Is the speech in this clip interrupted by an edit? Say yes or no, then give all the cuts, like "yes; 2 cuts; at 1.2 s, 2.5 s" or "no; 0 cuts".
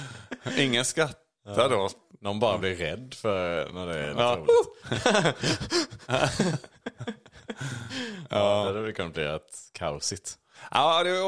no; 0 cuts